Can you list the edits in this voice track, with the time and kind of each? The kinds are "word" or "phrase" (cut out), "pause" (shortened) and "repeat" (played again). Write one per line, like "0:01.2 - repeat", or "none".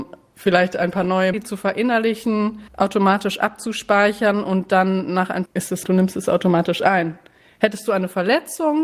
0:01.3 - phrase
0:02.7 - pause
0:05.5 - phrase
0:05.8 - phrase